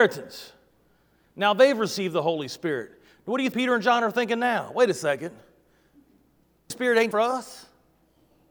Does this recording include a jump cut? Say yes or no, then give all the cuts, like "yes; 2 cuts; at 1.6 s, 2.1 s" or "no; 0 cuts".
yes; 3 cuts; at 3.5 s, 6.7 s, 7.1 s